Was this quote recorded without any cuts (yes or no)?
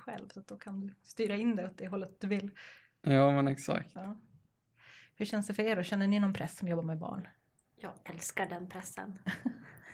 yes